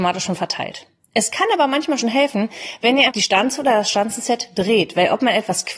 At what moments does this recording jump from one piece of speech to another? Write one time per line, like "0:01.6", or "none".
0:03.1

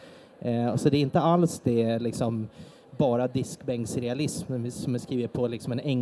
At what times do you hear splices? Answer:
none

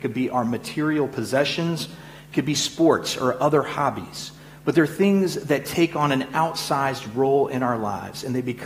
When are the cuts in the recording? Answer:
none

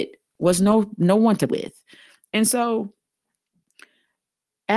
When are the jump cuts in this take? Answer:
0:01.5

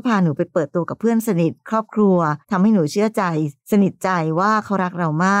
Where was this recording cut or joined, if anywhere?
0:02.4
0:03.6

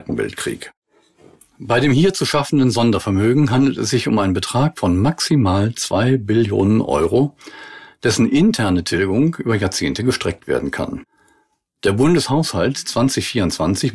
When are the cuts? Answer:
none

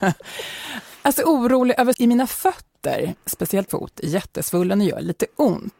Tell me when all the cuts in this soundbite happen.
0:01.9
0:03.7

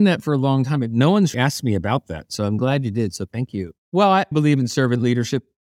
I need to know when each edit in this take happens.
0:01.3
0:03.8
0:04.3

